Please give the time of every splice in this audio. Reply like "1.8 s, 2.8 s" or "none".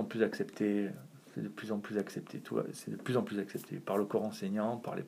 none